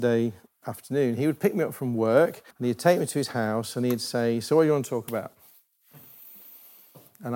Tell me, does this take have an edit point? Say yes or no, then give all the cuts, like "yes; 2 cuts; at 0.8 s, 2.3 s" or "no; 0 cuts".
yes; 1 cut; at 2.5 s